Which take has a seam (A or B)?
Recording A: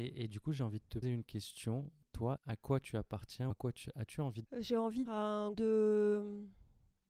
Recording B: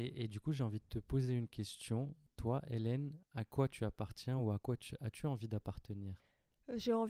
A